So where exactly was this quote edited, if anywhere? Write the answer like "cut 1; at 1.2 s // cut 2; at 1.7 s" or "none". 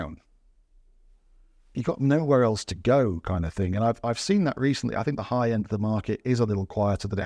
none